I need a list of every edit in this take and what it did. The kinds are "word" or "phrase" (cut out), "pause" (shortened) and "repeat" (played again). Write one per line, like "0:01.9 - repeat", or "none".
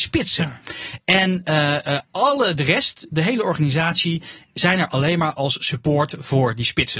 none